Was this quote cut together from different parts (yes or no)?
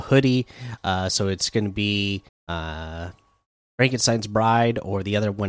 yes